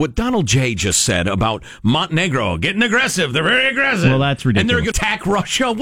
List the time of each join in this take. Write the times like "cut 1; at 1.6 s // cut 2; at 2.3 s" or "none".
cut 1; at 4.9 s